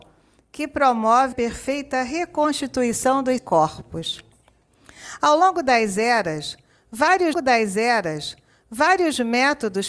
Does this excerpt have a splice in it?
yes; 3 cuts; at 1.3 s, 3.4 s, 7.3 s

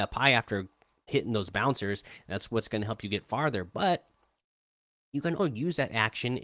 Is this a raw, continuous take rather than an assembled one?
no; 2 cuts; at 1.1 s, 5.4 s

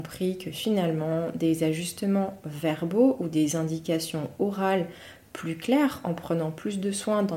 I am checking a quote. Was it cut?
no; 0 cuts

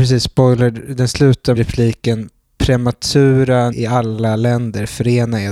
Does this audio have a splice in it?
yes; 2 cuts; at 1.6 s, 3.7 s

